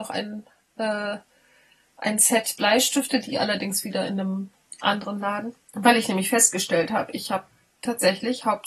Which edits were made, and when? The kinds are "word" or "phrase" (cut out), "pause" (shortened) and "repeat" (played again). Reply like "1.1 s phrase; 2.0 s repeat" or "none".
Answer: 5.6 s pause

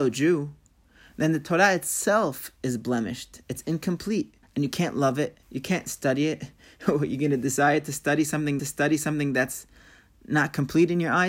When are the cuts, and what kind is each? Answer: 4.4 s pause; 5.4 s pause; 8.6 s repeat

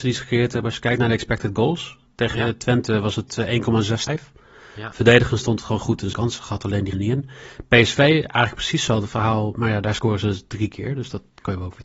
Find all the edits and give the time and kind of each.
4.1 s word; 6.1 s word; 6.9 s word

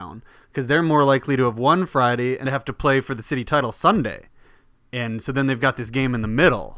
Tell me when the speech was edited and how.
2.4 s word

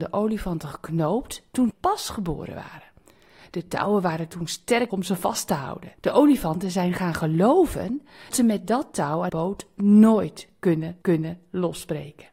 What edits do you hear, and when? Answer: 1.7 s word; 4.9 s word; 6.0 s pause; 8.3 s word; 9.3 s word; 11.0 s repeat

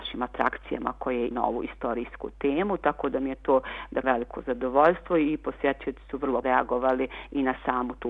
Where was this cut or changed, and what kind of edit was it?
1.3 s word; 4.0 s word; 6.4 s word

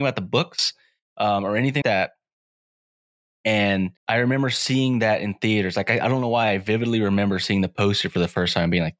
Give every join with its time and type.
1.8 s word; 4.0 s pause

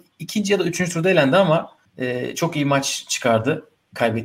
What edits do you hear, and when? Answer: 1.8 s pause

